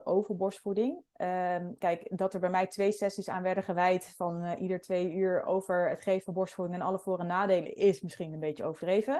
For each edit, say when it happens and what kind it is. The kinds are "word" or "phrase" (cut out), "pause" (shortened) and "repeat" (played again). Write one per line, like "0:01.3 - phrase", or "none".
none